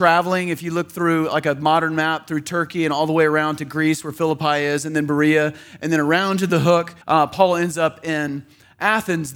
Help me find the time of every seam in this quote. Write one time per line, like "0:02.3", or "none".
0:07.0